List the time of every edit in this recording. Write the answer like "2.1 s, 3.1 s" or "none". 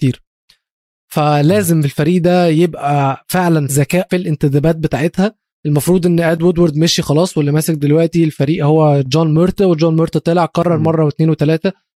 3.7 s, 4.1 s

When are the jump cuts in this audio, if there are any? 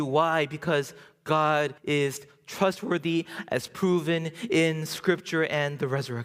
1.8 s

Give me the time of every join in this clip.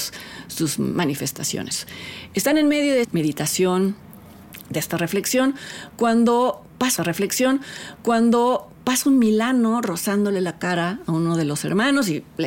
3.0 s, 7.0 s

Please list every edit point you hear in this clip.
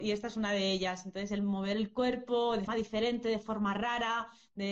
2.7 s

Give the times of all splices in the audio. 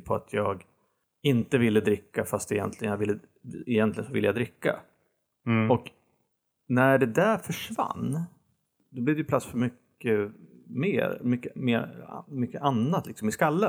none

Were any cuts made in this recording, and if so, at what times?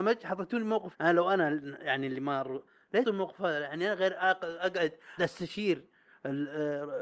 0.9 s, 3.0 s, 5.2 s

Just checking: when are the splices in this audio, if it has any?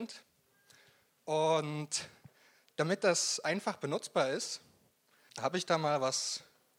5.3 s

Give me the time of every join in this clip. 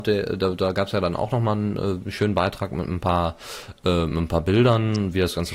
none

